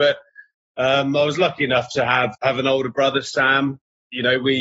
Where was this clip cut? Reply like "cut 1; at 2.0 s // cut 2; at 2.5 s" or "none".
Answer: cut 1; at 2.3 s